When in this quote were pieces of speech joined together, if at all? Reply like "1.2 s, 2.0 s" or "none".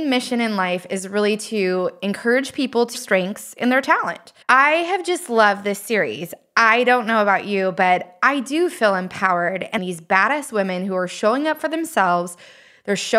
2.9 s, 4.4 s, 9.8 s